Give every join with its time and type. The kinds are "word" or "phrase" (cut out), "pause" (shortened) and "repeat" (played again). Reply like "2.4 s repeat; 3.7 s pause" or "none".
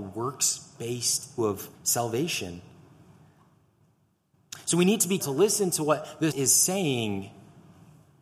1.4 s word; 1.7 s pause; 5.2 s word; 6.3 s word